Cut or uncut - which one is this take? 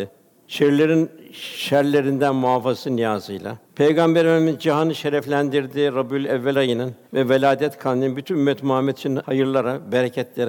cut